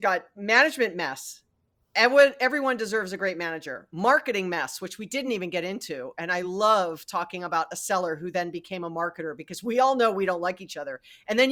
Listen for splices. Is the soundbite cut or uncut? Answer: uncut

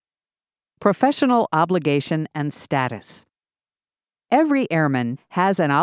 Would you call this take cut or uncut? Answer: uncut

